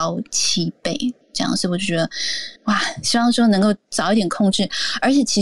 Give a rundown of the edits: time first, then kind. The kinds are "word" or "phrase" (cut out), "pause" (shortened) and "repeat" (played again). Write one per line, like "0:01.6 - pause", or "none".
0:01.2 - pause
0:02.6 - pause

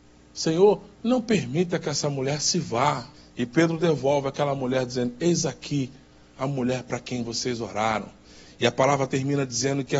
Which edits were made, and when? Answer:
0:03.1 - pause

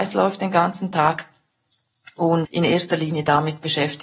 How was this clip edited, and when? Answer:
0:02.4 - word

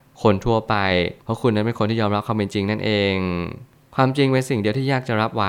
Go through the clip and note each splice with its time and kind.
0:01.2 - pause

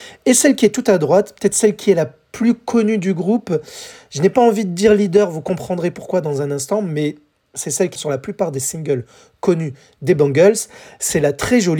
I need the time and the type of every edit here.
0:08.0 - word

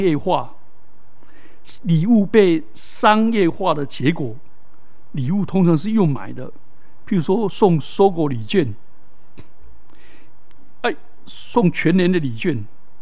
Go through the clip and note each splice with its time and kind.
none

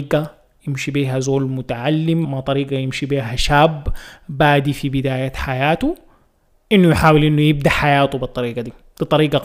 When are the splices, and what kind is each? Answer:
0:02.2 - word

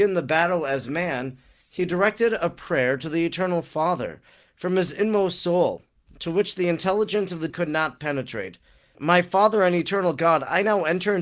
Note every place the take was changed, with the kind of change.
0:07.5 - word
0:08.9 - word

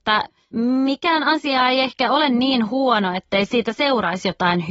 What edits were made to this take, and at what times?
none

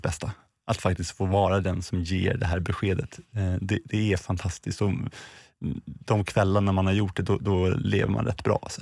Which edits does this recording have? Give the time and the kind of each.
none

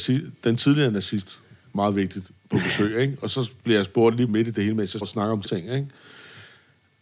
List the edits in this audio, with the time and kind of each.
0:04.3 - word
0:05.0 - word
0:05.4 - word

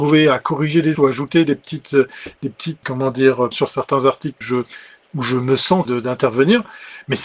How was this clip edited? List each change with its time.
0:00.9 - word
0:02.8 - word
0:03.5 - word
0:04.4 - word
0:05.9 - word

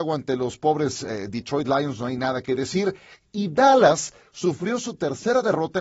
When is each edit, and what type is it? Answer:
none

